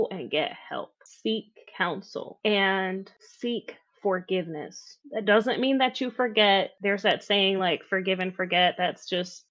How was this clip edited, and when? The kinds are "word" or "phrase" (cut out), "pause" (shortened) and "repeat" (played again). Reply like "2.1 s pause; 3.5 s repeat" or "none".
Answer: none